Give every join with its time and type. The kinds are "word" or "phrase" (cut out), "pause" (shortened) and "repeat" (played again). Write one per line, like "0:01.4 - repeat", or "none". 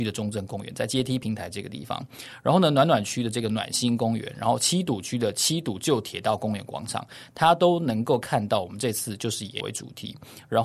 0:09.6 - word

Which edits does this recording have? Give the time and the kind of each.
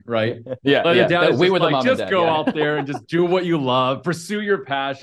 none

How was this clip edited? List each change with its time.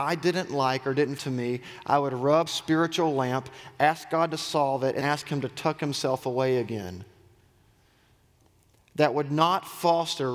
0:01.2 - phrase
0:02.5 - word
0:05.0 - word

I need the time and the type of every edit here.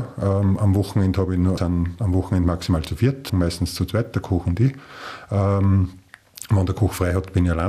0:01.6 - phrase
0:03.3 - phrase

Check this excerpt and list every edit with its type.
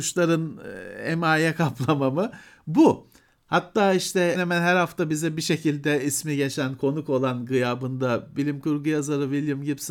0:04.3 - word

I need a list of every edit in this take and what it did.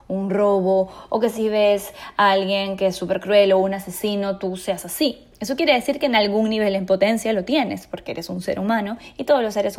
none

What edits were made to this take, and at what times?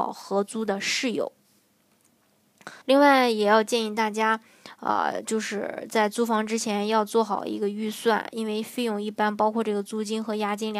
0:02.8 - pause

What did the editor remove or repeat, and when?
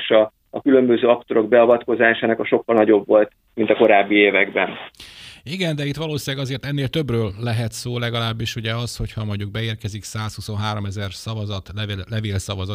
none

